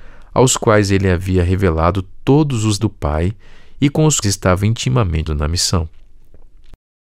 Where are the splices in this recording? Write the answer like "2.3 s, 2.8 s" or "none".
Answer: 2.8 s, 4.2 s, 5.3 s